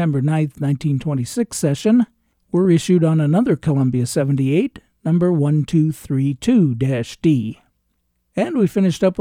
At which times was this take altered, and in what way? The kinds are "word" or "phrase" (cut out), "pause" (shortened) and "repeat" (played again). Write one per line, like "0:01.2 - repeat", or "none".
none